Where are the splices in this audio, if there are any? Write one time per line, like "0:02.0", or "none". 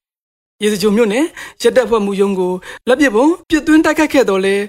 0:02.8
0:03.4